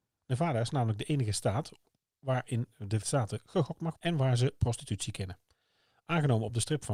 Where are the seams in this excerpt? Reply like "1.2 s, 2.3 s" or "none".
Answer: 3.0 s, 4.0 s